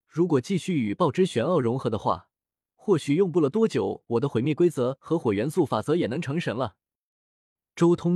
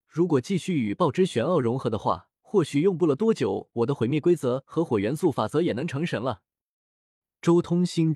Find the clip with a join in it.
second; 1 cut; at 2.4 s

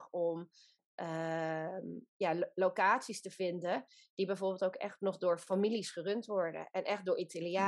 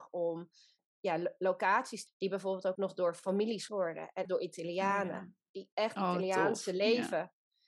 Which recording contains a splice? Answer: second; 6 cuts; at 0.9 s, 2.1 s, 2.8 s, 3.7 s, 4.3 s, 6.0 s

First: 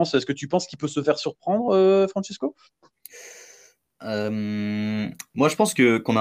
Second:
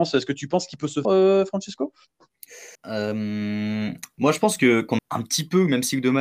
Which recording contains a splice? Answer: second; 3 cuts; at 1.0 s, 2.7 s, 5.0 s

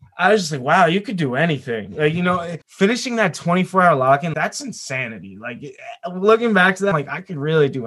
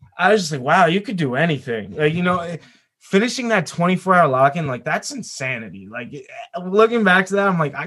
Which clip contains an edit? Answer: first; 3 cuts; at 2.6 s, 4.3 s, 6.9 s

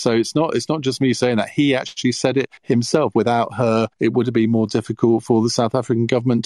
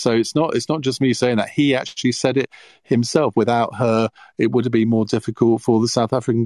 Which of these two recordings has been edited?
first; 2 cuts; at 2.6 s, 3.9 s

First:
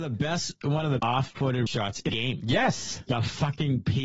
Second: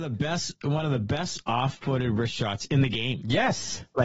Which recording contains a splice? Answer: first; 4 cuts; at 1.0 s, 1.7 s, 2.1 s, 3.1 s

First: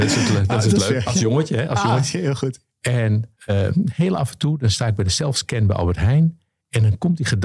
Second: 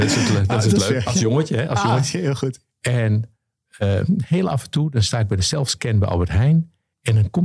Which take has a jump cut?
first; 1 cut; at 3.4 s

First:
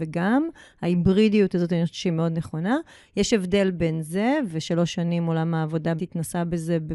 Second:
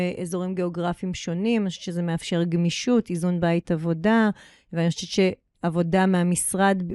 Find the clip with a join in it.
first; 1 cut; at 6.0 s

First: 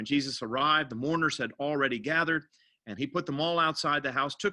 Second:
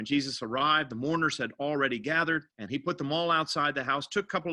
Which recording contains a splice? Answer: second; 1 cut; at 2.5 s

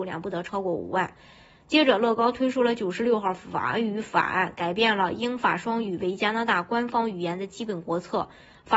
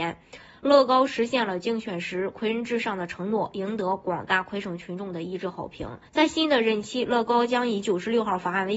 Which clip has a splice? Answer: second; 1 cut; at 6.1 s

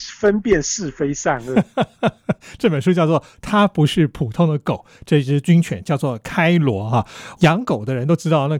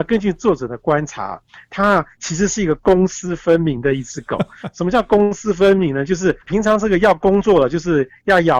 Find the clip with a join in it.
second; 1 cut; at 6.4 s

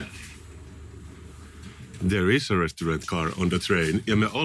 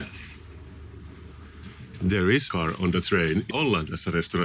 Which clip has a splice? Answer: second; 2 cuts; at 2.5 s, 3.5 s

